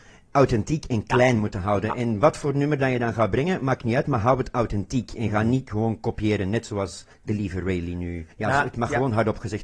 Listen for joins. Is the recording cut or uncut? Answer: cut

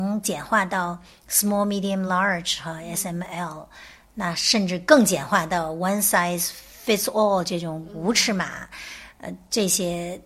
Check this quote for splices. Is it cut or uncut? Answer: uncut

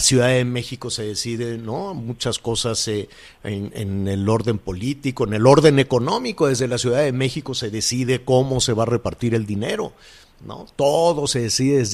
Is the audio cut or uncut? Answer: uncut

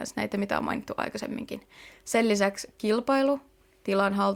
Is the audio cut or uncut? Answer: uncut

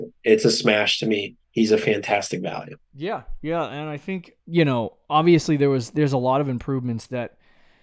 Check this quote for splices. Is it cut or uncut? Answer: cut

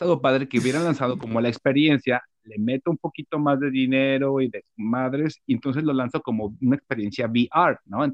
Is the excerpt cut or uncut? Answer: uncut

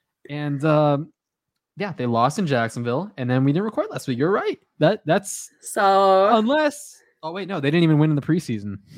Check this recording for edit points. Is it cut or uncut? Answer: uncut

